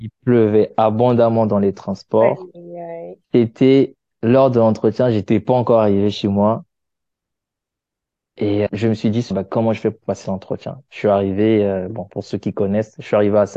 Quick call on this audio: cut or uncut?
cut